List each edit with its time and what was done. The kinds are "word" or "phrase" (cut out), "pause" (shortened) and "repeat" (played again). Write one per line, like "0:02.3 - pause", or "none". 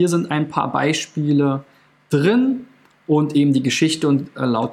none